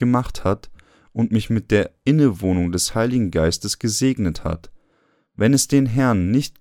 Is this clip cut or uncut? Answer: uncut